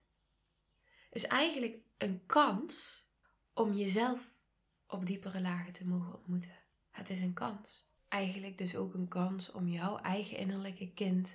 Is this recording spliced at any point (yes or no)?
yes